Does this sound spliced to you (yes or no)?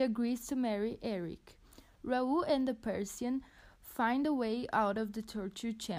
no